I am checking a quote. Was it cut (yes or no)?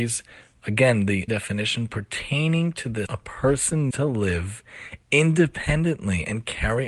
yes